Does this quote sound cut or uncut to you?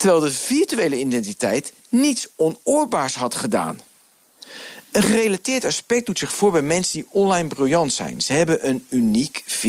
uncut